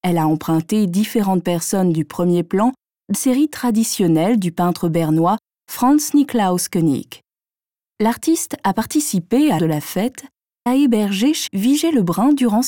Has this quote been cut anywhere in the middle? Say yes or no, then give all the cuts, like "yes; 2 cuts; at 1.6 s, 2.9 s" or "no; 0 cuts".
yes; 4 cuts; at 3.1 s, 9.6 s, 10.7 s, 11.5 s